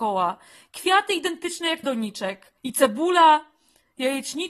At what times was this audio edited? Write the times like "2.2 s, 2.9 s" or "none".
1.8 s, 2.6 s

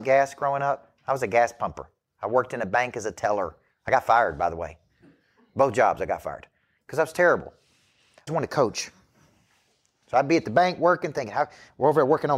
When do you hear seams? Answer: 8.3 s

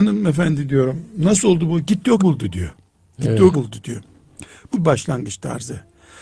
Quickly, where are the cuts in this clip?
2.2 s, 3.5 s, 4.7 s

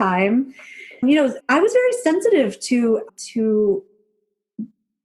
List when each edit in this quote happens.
1.0 s, 1.4 s, 3.1 s

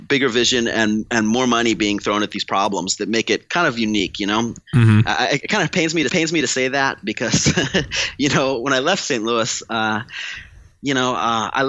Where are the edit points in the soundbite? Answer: 6.1 s

